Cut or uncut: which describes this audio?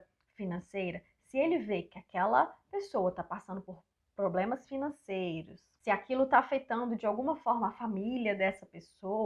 uncut